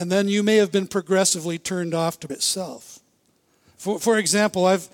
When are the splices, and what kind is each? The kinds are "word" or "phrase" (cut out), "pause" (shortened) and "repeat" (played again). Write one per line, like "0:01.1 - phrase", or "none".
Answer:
0:02.3 - word